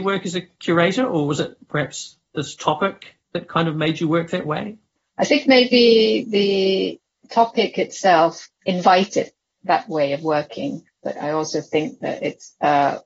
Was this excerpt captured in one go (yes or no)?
yes